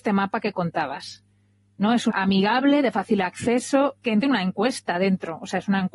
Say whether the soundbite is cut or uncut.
cut